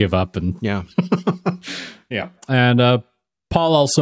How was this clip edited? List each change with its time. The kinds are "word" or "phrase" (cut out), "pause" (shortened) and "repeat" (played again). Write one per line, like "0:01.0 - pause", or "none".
0:02.4 - pause